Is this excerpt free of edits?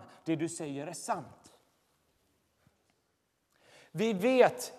yes; 0 cuts

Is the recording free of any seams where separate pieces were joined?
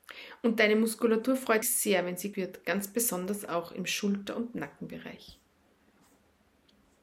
no; 2 cuts; at 1.6 s, 2.3 s

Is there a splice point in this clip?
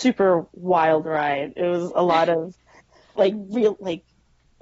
yes; 1 cut; at 3.1 s

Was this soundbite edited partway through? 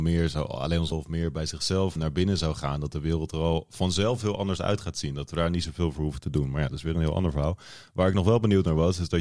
yes; 2 cuts; at 0.9 s, 2.0 s

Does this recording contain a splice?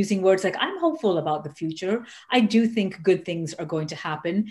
no; 0 cuts

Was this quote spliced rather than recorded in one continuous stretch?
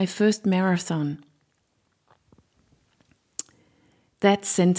no; 0 cuts

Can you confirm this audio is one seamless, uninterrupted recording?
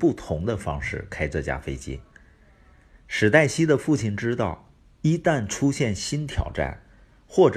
yes; 0 cuts

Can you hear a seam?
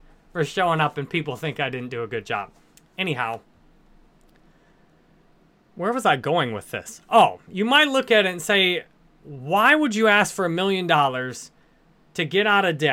no; 0 cuts

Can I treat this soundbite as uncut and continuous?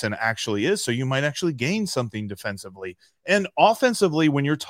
yes; 0 cuts

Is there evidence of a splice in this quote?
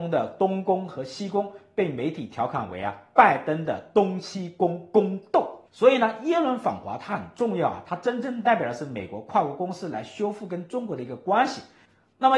yes; 1 cut; at 5.7 s

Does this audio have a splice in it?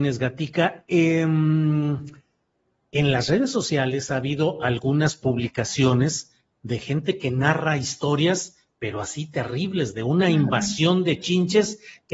no; 0 cuts

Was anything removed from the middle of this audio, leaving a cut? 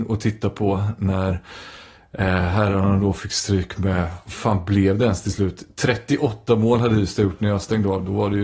no; 0 cuts

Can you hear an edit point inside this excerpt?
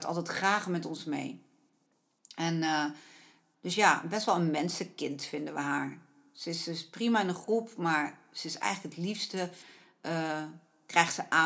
no; 0 cuts

